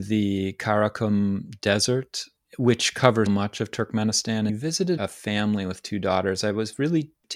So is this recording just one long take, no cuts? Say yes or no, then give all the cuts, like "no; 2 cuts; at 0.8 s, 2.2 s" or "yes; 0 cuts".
no; 3 cuts; at 3.3 s, 4.5 s, 5.0 s